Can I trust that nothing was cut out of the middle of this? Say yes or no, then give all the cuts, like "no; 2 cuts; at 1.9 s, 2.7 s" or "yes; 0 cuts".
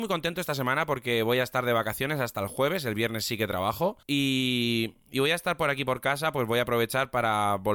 no; 1 cut; at 4.0 s